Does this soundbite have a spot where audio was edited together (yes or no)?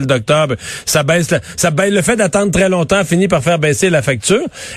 no